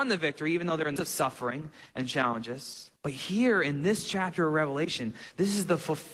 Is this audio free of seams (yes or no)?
no